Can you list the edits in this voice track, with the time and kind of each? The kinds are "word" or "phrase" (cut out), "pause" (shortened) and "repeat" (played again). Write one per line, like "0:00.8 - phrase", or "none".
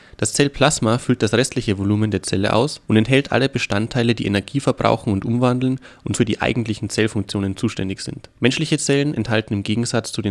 0:02.8 - pause
0:06.1 - word
0:08.4 - pause